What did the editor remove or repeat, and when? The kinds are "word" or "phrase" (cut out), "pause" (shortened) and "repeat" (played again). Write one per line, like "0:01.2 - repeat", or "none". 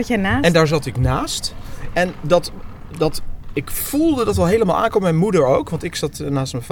none

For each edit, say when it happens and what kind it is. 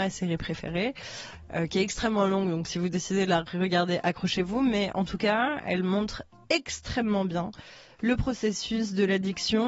none

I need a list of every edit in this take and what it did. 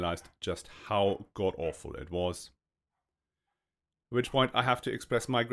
none

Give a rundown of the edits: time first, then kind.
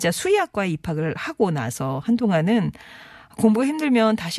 none

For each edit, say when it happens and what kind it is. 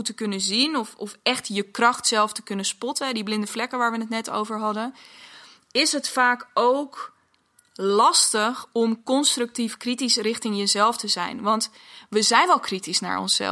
none

